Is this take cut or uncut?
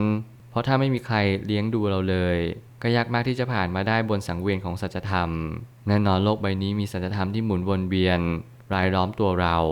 uncut